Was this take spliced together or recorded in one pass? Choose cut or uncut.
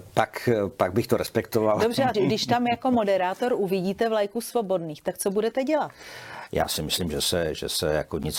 cut